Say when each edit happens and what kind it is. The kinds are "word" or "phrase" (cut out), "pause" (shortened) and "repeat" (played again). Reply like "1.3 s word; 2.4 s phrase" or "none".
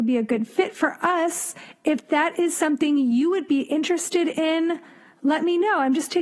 none